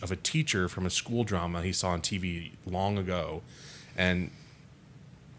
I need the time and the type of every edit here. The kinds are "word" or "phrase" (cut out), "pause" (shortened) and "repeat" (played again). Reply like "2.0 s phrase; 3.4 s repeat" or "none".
2.6 s pause